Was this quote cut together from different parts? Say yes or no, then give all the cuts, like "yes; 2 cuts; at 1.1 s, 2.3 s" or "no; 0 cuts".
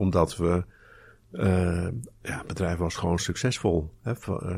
no; 0 cuts